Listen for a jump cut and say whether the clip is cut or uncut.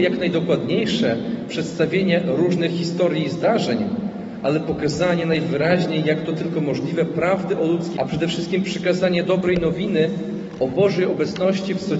cut